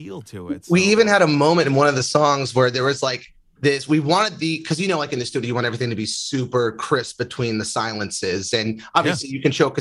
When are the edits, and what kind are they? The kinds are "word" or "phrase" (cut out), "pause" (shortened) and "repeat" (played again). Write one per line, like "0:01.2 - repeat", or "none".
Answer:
none